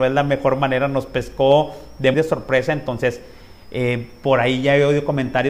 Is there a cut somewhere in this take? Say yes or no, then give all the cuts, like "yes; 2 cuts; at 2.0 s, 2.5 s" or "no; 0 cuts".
yes; 1 cut; at 2.1 s